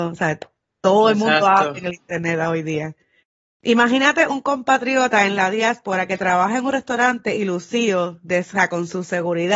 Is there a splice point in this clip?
no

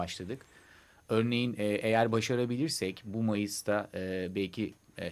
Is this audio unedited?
yes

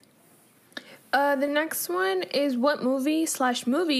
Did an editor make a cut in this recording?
no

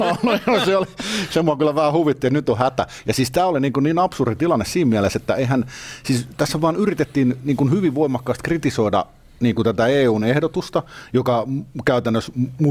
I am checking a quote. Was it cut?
yes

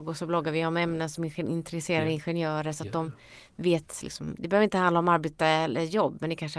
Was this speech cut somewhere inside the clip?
no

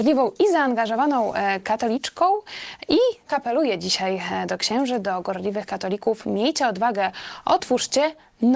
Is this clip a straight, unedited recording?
no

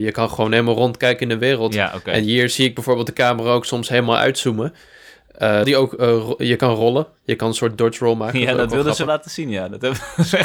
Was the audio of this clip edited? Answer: yes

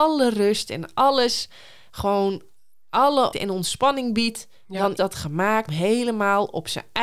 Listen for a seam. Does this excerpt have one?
yes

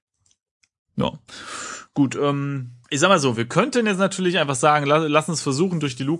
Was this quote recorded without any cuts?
no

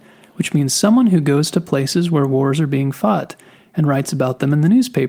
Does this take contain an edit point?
no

